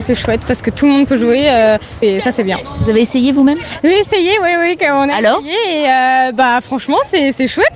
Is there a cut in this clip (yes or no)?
yes